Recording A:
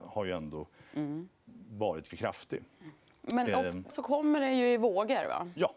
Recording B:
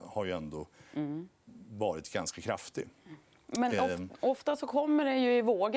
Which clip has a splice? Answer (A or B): A